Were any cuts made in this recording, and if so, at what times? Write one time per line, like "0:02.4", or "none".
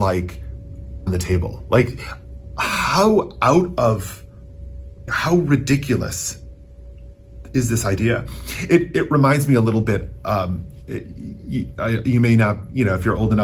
0:01.1
0:05.1